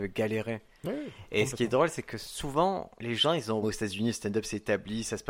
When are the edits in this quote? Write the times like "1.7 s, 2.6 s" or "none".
3.0 s, 3.6 s

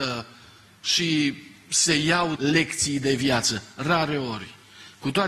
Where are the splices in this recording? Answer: 2.4 s

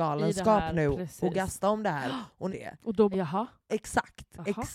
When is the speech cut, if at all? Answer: 2.5 s, 3.1 s, 3.7 s

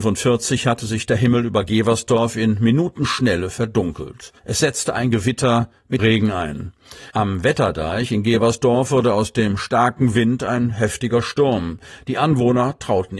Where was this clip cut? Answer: 4.4 s, 6.0 s, 7.1 s

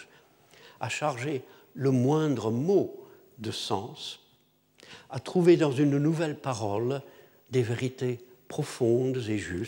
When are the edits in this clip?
none

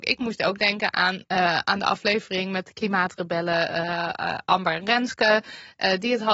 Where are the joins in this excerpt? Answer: none

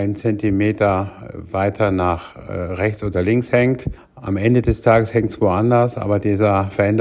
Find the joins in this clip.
4.0 s

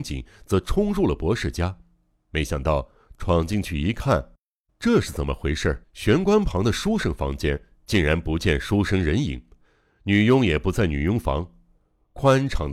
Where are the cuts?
5.8 s

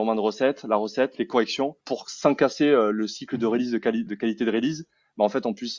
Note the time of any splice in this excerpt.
1.8 s, 4.1 s

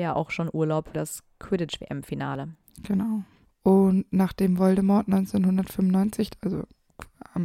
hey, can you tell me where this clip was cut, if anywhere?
0.9 s

